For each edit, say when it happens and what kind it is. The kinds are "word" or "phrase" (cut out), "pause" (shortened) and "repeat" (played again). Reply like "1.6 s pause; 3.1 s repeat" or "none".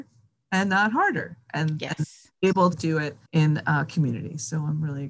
2.7 s word; 3.3 s pause